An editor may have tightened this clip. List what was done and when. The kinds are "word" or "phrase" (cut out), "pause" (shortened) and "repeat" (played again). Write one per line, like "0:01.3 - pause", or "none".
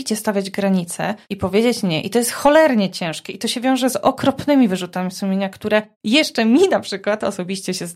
0:01.2 - pause
0:05.9 - pause